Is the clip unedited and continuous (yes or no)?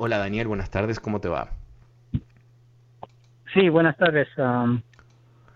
yes